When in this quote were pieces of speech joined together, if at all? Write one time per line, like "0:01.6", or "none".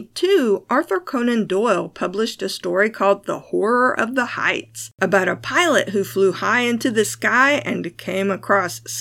0:04.9